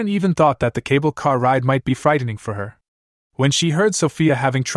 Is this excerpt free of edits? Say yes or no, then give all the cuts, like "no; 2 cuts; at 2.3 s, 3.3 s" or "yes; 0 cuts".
yes; 0 cuts